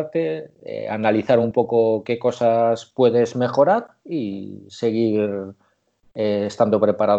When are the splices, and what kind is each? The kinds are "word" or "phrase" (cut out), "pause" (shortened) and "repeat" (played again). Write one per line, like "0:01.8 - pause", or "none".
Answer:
none